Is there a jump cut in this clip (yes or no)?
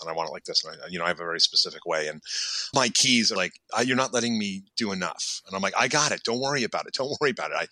yes